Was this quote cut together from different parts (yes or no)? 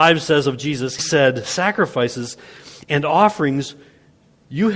yes